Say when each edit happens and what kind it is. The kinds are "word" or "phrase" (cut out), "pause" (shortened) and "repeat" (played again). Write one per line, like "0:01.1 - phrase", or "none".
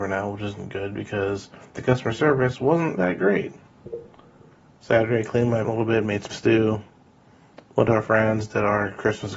0:03.0 - word
0:05.6 - word
0:06.3 - word

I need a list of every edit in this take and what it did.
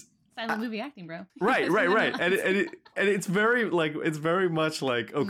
0:01.3 - pause

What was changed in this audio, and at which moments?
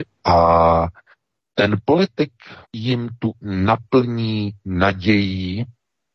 0:01.4 - pause
0:02.6 - pause
0:03.4 - word

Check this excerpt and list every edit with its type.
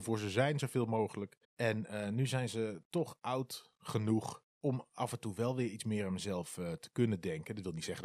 0:01.4 - pause
0:04.5 - pause

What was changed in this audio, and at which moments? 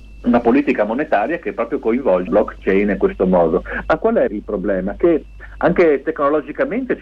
0:02.3 - word
0:04.3 - word

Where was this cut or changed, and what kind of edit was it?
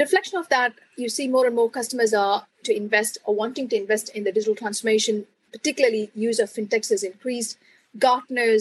0:02.6 - word

